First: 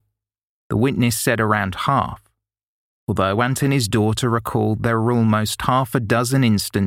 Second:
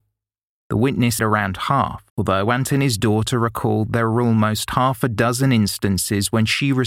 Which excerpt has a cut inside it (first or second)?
second